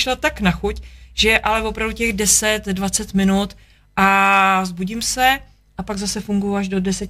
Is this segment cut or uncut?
uncut